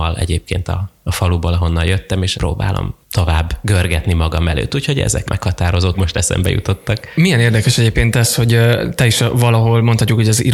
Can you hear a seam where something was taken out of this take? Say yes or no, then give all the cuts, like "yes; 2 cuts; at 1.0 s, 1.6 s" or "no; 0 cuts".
yes; 4 cuts; at 2.3 s, 3.0 s, 5.3 s, 5.9 s